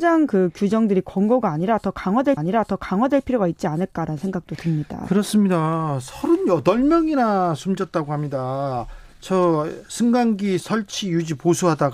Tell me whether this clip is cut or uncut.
cut